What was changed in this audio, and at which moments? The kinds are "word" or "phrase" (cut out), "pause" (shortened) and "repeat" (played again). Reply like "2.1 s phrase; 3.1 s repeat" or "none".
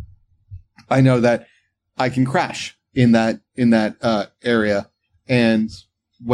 none